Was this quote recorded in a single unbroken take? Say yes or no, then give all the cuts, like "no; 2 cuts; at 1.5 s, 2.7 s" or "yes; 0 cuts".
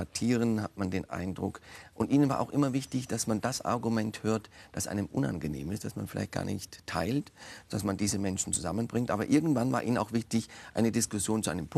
yes; 0 cuts